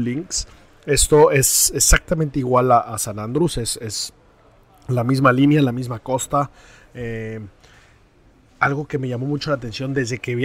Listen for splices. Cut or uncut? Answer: uncut